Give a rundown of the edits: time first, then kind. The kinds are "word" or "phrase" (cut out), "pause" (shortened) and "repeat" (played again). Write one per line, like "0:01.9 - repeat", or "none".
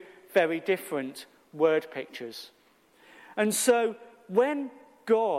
none